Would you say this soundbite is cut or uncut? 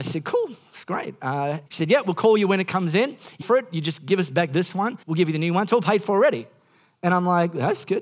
cut